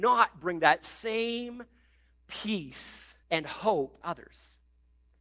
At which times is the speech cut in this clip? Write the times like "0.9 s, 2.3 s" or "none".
3.2 s, 4.0 s